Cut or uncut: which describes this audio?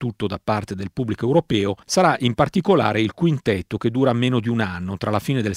cut